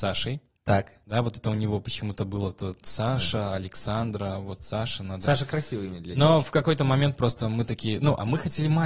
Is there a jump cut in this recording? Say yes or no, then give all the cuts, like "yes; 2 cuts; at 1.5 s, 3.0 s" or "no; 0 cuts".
no; 0 cuts